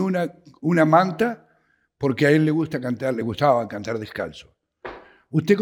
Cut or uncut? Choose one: uncut